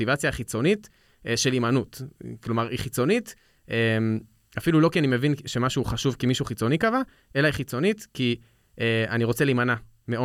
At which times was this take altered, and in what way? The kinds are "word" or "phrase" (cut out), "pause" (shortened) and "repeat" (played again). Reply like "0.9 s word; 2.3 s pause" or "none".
none

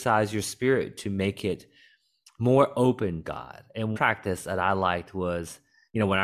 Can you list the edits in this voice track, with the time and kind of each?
3.2 s word; 3.9 s word

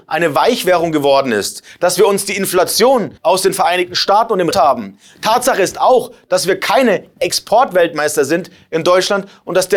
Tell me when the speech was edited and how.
3.2 s pause; 4.5 s phrase

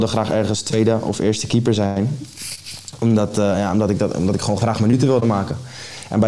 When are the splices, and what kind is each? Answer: none

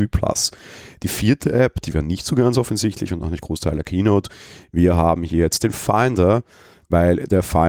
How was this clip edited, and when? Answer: none

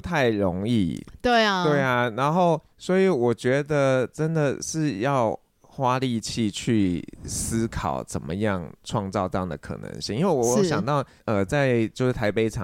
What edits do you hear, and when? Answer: 2.7 s pause; 5.5 s pause; 11.2 s pause

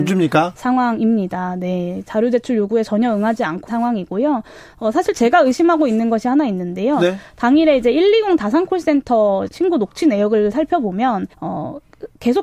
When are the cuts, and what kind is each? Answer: 3.7 s word; 9.5 s word; 11.3 s pause

